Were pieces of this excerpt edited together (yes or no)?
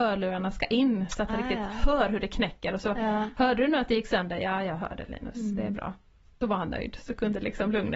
no